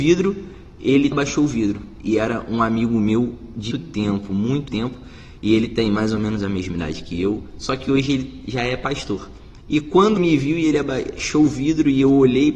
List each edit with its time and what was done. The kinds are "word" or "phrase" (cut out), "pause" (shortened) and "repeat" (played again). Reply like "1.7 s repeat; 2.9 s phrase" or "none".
1.1 s word; 3.7 s word; 4.7 s word; 10.2 s word